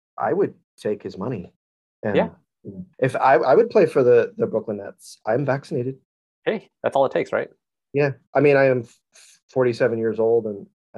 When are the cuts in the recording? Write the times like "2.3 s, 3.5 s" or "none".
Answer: 2.9 s, 6.8 s